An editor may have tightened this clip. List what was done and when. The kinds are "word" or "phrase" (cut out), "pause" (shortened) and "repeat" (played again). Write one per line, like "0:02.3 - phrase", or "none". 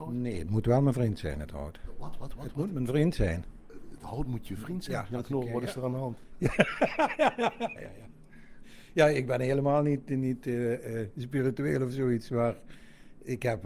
0:07.8 - word